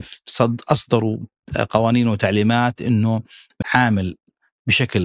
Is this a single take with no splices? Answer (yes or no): no